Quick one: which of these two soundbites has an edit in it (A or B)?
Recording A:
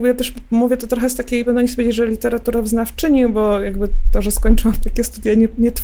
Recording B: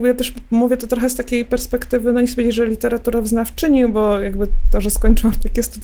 A